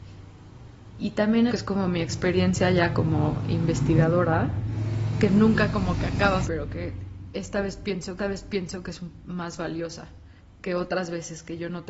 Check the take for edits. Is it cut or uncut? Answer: cut